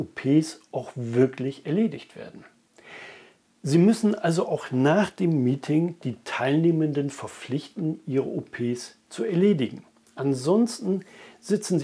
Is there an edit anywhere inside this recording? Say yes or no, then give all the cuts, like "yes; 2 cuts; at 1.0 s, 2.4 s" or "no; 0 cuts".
no; 0 cuts